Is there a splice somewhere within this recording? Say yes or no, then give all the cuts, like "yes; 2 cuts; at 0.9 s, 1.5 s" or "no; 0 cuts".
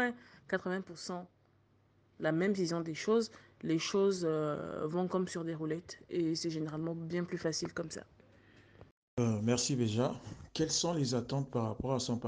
no; 0 cuts